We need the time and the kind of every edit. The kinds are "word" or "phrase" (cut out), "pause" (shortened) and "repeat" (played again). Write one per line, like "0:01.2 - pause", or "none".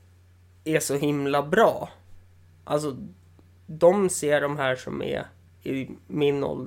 none